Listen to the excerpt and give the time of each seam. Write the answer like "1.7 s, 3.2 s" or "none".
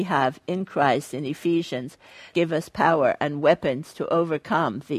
2.3 s